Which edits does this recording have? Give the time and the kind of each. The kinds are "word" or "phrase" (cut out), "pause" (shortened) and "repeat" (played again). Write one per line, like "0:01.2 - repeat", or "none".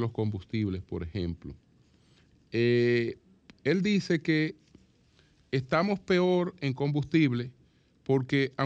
none